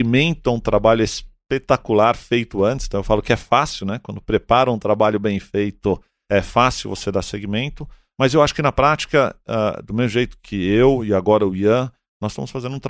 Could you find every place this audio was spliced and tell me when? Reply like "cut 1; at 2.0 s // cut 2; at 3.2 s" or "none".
none